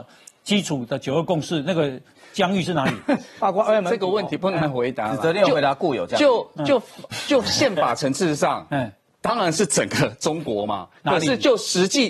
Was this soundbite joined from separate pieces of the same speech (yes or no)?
no